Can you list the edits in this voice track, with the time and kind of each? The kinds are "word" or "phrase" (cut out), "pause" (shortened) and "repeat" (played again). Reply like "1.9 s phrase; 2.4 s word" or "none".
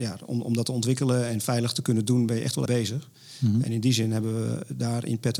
2.6 s word